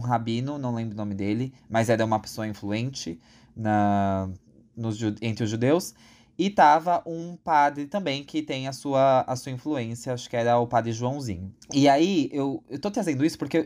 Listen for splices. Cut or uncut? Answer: cut